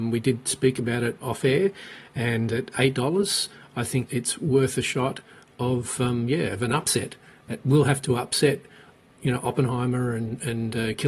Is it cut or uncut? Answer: cut